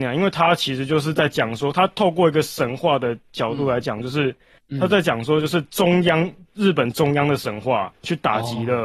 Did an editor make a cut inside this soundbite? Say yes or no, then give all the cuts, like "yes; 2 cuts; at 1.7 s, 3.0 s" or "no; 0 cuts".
yes; 1 cut; at 7.9 s